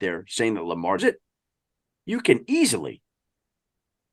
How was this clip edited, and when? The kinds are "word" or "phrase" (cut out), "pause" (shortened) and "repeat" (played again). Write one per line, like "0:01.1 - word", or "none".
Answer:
0:01.0 - word

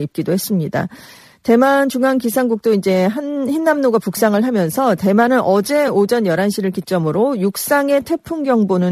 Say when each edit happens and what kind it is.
none

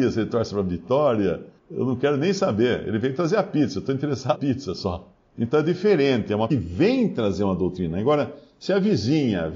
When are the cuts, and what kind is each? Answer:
0:01.6 - pause
0:04.3 - word
0:05.2 - pause
0:06.5 - phrase

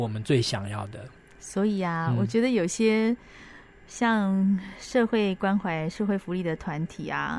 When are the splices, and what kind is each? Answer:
none

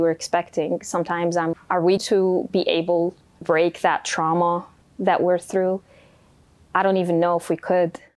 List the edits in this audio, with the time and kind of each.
0:01.5 - word
0:02.0 - word
0:03.4 - word
0:05.0 - word

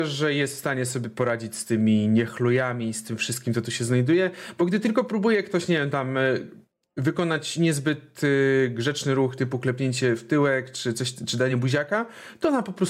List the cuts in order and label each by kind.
none

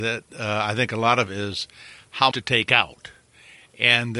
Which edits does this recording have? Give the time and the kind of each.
0:01.3 - phrase
0:02.3 - word

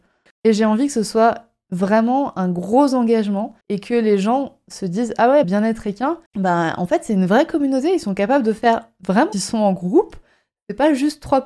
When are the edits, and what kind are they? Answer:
0:03.6 - pause
0:05.4 - phrase
0:06.3 - pause
0:09.3 - phrase

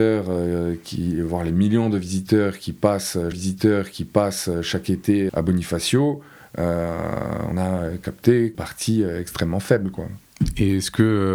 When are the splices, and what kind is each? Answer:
0:03.3 - repeat
0:05.3 - word
0:07.5 - word
0:08.5 - word

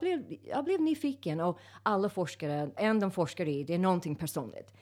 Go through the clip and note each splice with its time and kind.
0:02.8 - word

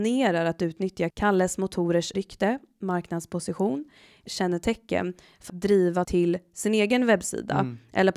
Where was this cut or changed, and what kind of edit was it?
0:01.1 - word
0:02.1 - word
0:04.3 - word
0:05.5 - word
0:06.0 - word

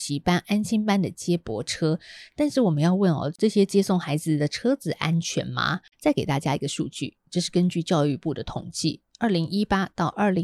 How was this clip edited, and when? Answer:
0:05.9 - pause

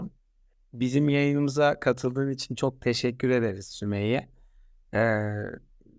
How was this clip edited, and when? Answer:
none

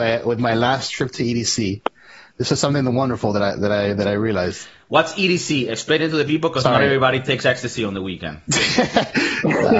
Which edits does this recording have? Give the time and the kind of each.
none

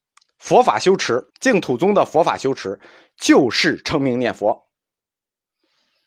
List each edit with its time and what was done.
0:01.3 - pause

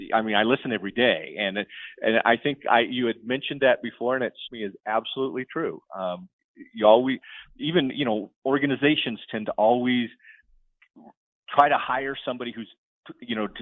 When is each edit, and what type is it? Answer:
0:04.5 - word

